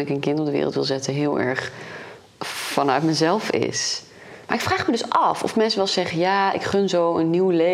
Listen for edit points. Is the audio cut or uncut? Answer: uncut